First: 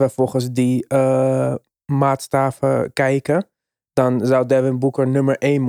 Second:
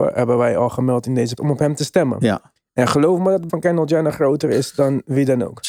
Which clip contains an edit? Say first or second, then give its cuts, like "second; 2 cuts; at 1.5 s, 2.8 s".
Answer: second; 2 cuts; at 1.4 s, 3.5 s